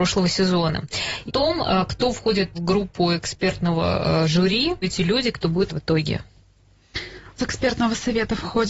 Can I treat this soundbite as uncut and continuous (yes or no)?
no